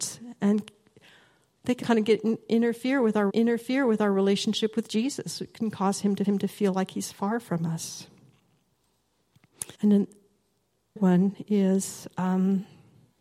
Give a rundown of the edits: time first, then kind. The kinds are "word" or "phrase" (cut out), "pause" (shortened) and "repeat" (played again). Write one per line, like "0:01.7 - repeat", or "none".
0:01.8 - word
0:03.3 - repeat
0:06.2 - repeat
0:09.7 - pause
0:11.0 - word